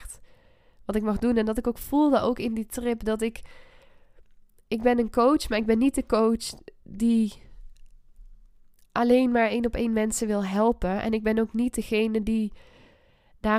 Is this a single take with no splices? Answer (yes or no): yes